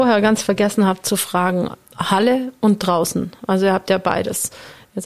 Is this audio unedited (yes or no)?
yes